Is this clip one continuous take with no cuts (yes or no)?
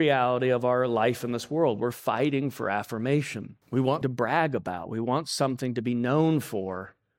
no